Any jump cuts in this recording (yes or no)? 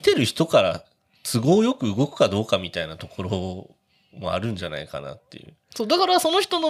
no